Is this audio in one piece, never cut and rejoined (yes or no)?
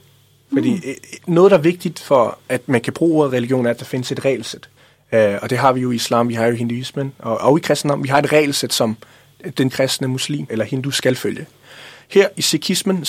no